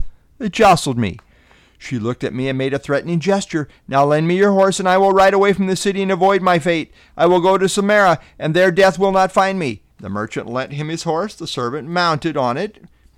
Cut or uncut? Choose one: cut